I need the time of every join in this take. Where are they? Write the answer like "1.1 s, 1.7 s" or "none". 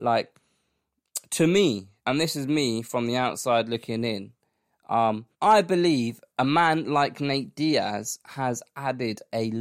2.0 s, 5.3 s, 6.3 s